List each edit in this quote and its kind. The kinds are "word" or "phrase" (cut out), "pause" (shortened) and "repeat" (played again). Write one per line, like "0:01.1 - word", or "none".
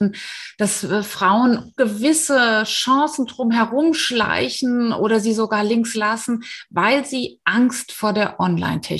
0:01.8 - word
0:05.9 - word